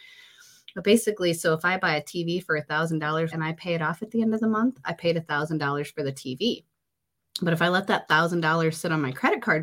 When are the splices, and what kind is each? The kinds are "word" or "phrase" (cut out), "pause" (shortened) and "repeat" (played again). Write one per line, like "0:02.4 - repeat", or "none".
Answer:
0:03.3 - phrase